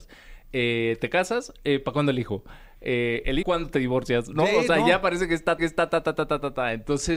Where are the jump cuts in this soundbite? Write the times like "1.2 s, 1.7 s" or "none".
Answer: 3.4 s, 5.6 s